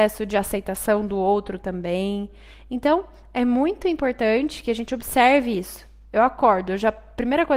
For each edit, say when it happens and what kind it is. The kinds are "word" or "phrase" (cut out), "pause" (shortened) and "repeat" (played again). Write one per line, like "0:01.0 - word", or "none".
none